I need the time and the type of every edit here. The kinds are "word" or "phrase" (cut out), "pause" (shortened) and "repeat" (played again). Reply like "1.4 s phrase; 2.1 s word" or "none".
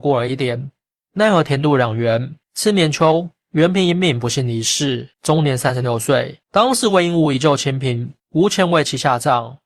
2.4 s pause; 5.1 s pause; 6.4 s pause; 8.2 s pause